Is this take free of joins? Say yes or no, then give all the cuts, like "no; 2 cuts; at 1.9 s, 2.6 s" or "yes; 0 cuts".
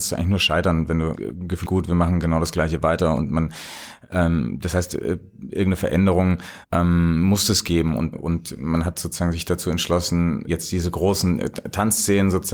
no; 5 cuts; at 1.1 s, 1.6 s, 6.6 s, 8.1 s, 10.5 s